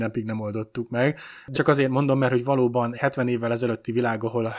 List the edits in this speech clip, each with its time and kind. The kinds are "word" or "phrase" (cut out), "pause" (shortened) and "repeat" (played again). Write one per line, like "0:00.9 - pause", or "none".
0:01.5 - word
0:02.9 - word